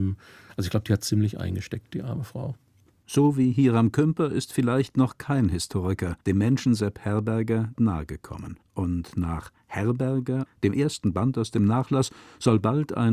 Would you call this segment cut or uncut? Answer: cut